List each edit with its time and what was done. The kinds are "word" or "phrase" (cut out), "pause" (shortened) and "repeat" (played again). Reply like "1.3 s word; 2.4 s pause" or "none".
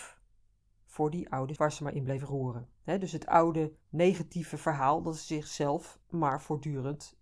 1.6 s word; 3.8 s pause; 6.0 s pause